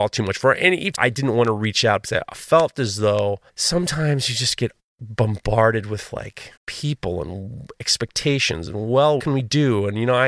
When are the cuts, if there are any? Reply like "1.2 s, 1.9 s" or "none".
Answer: 0.9 s, 3.5 s, 6.6 s, 9.2 s